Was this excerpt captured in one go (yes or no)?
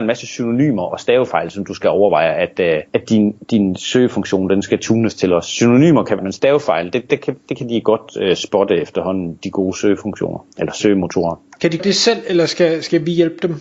no